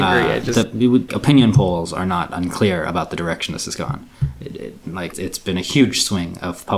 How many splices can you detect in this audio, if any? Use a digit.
2